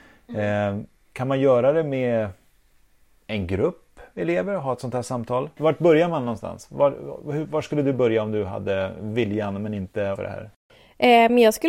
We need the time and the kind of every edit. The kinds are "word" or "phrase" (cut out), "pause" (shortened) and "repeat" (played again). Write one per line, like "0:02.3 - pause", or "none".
0:10.2 - word